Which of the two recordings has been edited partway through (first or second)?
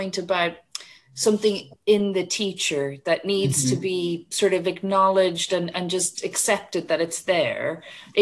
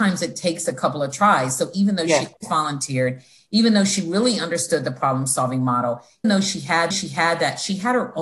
second